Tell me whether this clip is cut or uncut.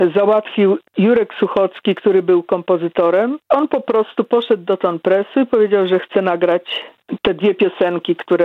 uncut